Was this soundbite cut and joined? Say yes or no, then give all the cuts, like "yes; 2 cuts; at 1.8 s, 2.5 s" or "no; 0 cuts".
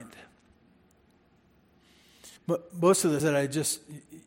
yes; 2 cuts; at 2.4 s, 3.2 s